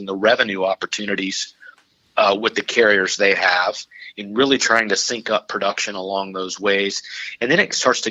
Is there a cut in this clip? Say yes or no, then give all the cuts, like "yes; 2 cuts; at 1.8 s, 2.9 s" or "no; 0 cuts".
no; 0 cuts